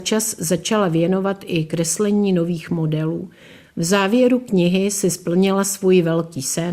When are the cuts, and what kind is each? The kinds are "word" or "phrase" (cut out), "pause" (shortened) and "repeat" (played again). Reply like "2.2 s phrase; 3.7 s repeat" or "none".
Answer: none